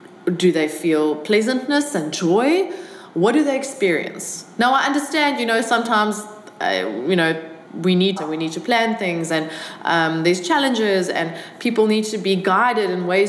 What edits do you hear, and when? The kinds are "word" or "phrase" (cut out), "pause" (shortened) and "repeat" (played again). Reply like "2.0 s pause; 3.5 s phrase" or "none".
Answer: 7.6 s pause; 8.2 s phrase